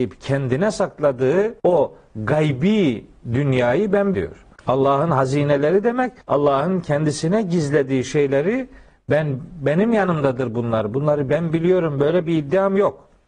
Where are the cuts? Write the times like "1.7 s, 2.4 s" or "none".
1.6 s, 4.1 s, 4.6 s, 6.2 s